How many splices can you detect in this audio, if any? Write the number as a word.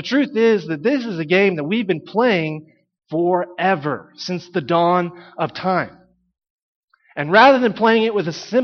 zero